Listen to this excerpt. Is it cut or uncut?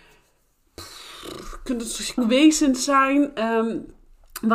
cut